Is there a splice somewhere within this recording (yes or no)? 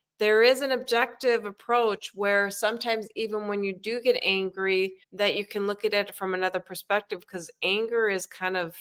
yes